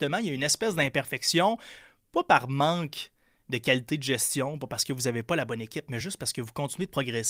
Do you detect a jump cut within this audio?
no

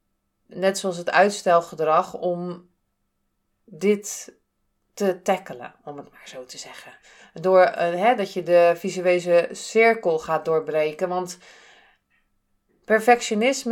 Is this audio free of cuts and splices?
yes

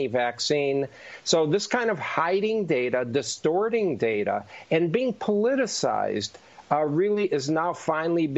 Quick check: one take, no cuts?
yes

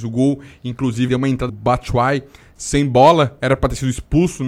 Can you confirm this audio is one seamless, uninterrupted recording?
no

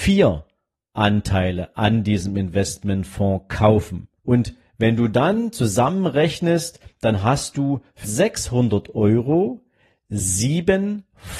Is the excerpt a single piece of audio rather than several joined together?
no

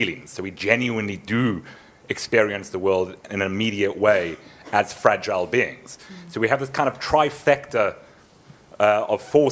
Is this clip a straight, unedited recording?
yes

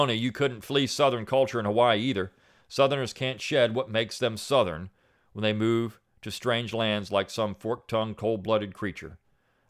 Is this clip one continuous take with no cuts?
yes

